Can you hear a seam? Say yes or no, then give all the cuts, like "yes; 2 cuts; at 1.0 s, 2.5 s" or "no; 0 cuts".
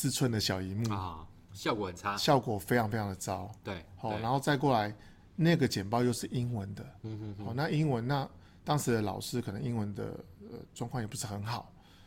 no; 0 cuts